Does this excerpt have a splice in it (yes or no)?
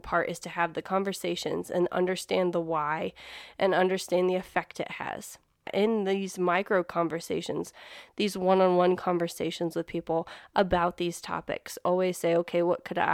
no